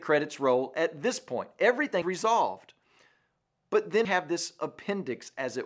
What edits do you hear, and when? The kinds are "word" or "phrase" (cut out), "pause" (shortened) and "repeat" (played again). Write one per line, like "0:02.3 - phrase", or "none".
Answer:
0:02.0 - word
0:04.0 - word